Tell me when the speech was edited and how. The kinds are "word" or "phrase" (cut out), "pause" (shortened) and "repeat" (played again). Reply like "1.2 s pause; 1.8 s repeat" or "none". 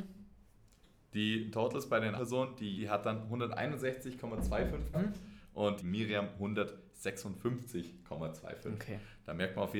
2.2 s word; 2.8 s word; 4.9 s word; 5.8 s word